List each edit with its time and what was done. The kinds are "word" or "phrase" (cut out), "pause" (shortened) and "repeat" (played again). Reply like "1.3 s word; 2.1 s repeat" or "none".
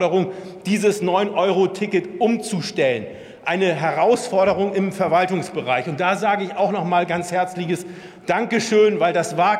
none